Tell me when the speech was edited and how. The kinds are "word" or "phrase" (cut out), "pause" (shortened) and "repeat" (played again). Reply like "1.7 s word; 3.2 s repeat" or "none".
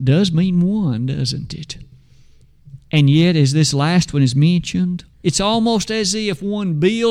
2.8 s pause; 5.1 s pause